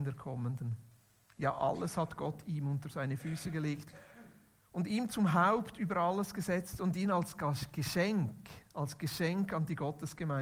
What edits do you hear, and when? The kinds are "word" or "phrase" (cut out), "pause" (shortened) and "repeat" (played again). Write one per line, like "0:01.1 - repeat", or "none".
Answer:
none